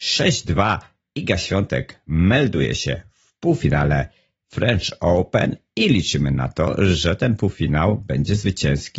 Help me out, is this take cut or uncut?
uncut